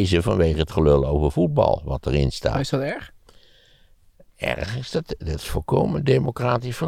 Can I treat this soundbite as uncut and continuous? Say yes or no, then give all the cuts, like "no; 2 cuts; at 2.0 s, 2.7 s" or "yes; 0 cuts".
yes; 0 cuts